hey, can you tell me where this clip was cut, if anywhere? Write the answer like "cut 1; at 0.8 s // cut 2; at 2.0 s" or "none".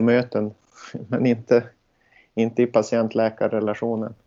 none